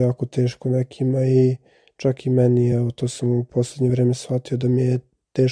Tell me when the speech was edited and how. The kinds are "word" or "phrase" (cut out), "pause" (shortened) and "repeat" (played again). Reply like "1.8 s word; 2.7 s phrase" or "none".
none